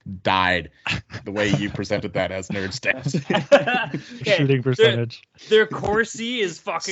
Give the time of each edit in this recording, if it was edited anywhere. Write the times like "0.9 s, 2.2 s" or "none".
4.2 s